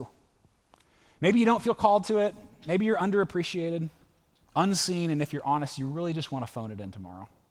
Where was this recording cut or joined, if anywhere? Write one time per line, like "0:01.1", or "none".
none